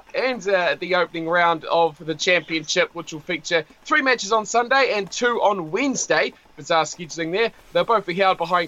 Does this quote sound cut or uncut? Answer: uncut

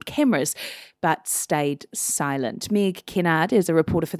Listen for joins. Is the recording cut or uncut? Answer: uncut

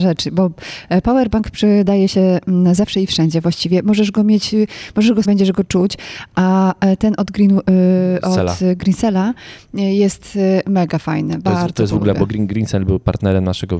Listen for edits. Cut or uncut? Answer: cut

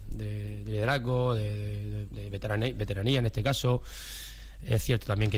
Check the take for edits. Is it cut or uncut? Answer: cut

